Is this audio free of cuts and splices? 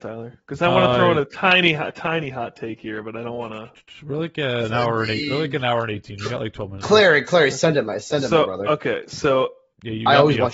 no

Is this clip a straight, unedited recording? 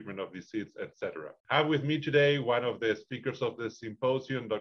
no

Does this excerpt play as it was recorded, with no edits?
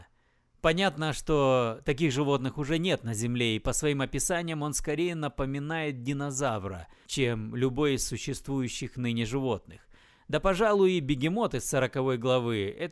yes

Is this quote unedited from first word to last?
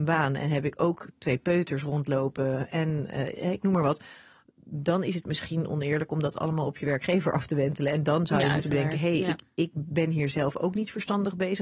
yes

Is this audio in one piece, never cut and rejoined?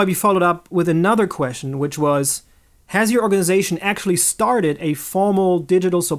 yes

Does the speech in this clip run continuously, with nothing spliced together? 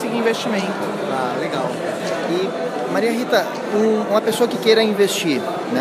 yes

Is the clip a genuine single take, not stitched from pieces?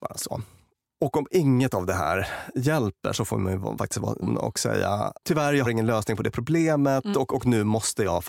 no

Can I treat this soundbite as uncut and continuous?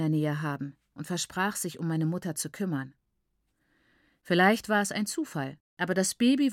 yes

